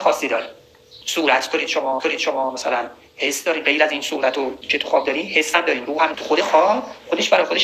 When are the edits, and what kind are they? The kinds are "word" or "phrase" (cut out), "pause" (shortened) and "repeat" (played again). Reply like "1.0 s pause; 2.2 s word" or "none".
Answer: 1.0 s pause; 2.0 s repeat; 4.6 s word; 6.1 s word

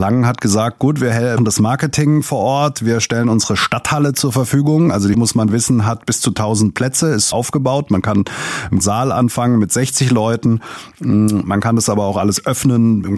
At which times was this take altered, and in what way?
1.4 s word; 5.1 s word; 7.3 s word; 8.8 s word

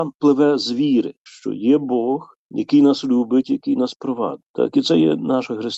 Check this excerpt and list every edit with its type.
4.5 s pause

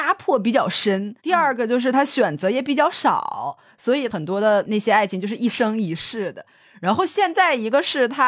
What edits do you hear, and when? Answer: 1.2 s pause

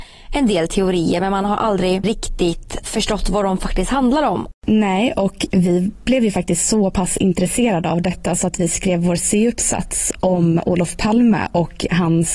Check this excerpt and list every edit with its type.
none

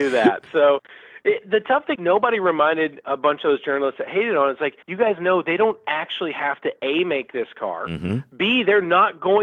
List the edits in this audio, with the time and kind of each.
2.0 s word; 4.8 s pause

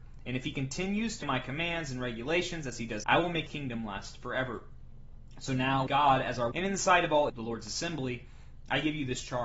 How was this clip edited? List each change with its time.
1.2 s word; 3.0 s word; 3.5 s word; 5.9 s word; 6.5 s word; 7.3 s word

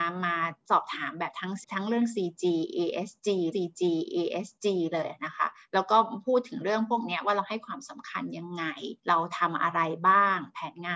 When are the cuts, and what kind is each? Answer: 1.6 s word; 3.5 s repeat; 9.0 s pause

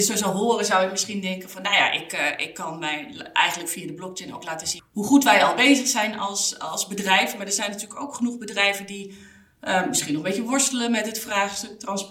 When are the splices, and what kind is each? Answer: 4.8 s word

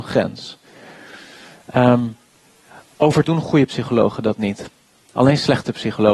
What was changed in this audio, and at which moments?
3.2 s word

